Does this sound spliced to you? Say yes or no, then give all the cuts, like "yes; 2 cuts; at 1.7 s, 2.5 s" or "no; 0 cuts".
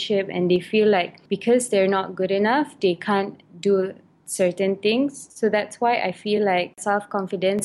no; 0 cuts